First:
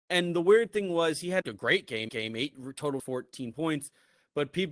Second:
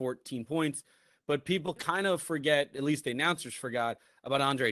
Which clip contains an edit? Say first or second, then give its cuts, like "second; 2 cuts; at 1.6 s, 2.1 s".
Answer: first; 3 cuts; at 1.4 s, 2.1 s, 3.0 s